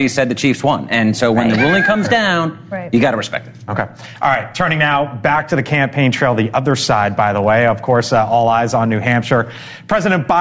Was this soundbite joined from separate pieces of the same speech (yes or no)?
no